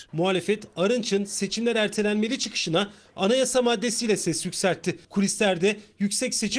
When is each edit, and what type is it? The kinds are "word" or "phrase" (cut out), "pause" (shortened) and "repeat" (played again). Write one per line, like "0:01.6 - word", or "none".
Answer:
0:05.0 - pause

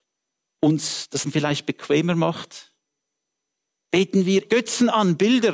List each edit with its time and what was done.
0:01.2 - word
0:04.5 - word

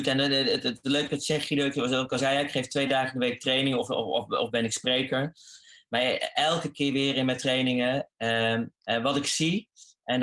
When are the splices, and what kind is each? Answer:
none

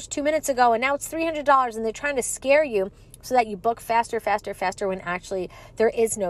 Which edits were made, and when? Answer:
none

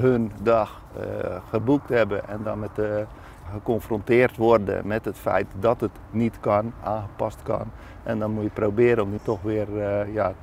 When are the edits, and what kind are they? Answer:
0:03.5 - word
0:09.2 - word

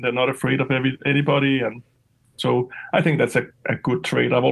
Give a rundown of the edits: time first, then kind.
none

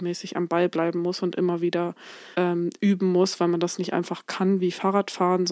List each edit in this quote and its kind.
0:02.3 - pause

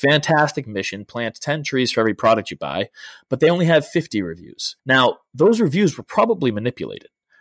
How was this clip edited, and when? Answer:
0:04.8 - pause

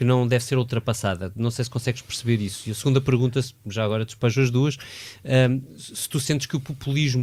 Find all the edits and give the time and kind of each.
none

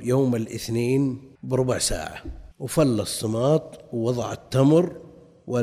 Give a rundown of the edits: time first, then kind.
0:01.4 - pause
0:02.5 - pause

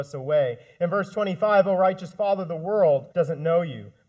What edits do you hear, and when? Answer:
0:03.1 - pause

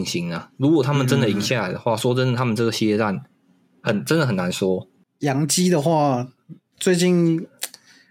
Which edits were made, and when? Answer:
none

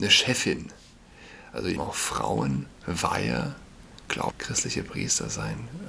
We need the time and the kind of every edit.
0:01.8 - word
0:02.8 - pause
0:04.3 - phrase

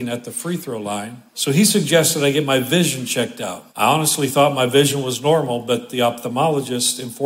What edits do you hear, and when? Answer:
0:01.3 - pause
0:03.7 - pause

